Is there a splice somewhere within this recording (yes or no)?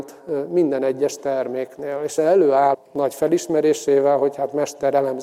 yes